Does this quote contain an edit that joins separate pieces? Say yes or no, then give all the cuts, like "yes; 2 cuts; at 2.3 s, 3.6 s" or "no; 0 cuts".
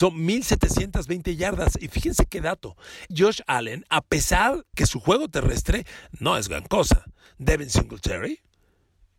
yes; 2 cuts; at 3.1 s, 4.7 s